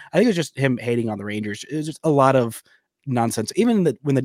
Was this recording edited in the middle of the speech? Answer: no; 0 cuts

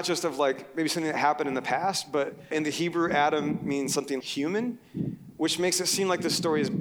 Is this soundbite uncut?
no; 2 cuts; at 2.5 s, 4.2 s

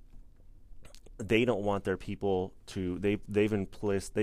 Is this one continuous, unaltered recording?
yes; 0 cuts

